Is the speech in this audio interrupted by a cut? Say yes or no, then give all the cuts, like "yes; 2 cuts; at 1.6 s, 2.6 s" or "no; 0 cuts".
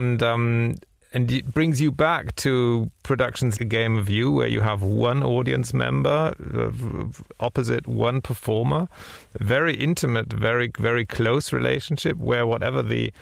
yes; 1 cut; at 3.6 s